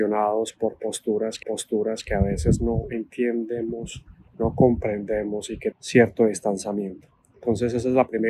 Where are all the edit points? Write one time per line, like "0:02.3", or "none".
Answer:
0:01.4
0:04.3
0:05.7

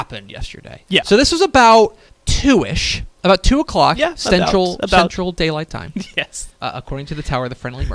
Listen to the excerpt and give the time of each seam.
0:02.1
0:06.6

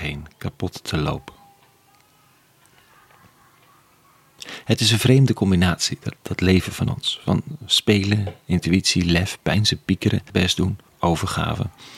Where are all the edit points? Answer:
0:06.2
0:10.3

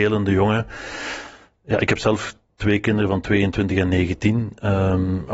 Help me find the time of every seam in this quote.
none

